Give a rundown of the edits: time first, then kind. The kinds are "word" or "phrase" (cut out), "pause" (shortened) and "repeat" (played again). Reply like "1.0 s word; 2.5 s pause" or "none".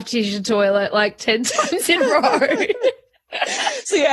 2.0 s word